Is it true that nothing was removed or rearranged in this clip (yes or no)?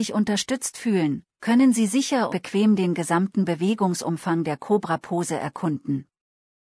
no